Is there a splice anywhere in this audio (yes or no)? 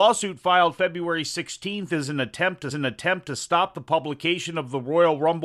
yes